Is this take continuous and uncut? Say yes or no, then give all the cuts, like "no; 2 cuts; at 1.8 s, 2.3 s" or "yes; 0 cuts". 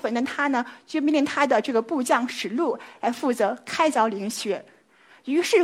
yes; 0 cuts